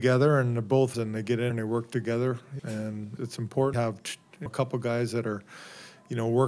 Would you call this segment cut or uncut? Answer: cut